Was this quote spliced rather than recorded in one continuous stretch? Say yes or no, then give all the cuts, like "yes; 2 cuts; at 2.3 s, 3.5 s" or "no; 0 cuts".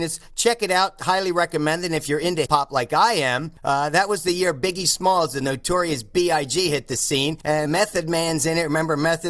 yes; 2 cuts; at 2.5 s, 7.7 s